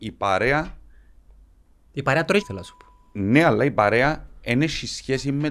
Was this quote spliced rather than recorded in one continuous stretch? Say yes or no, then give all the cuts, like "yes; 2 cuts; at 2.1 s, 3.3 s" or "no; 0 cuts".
yes; 1 cut; at 2.4 s